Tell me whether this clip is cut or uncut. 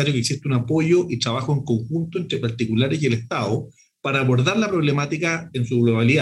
uncut